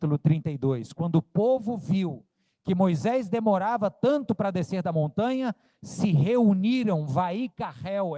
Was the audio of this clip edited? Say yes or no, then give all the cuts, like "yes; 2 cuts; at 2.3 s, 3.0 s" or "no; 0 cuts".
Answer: no; 0 cuts